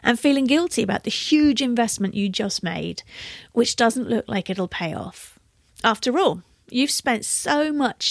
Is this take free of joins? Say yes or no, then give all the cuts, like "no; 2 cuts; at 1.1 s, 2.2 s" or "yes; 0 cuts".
yes; 0 cuts